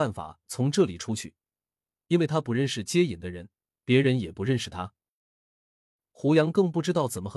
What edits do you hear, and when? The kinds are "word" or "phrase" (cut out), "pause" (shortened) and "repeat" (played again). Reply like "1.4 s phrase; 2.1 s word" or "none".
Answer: none